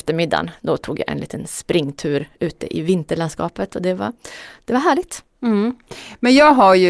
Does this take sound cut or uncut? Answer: uncut